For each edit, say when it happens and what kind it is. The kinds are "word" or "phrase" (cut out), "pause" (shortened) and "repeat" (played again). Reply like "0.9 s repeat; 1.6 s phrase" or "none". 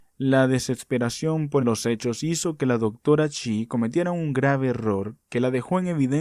1.6 s word